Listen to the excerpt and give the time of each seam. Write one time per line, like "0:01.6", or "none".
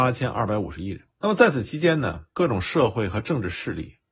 0:01.1
0:02.3